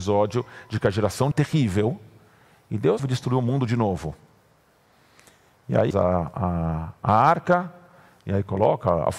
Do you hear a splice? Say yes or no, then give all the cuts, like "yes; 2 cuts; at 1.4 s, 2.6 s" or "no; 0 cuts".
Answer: yes; 3 cuts; at 1.3 s, 3.0 s, 5.9 s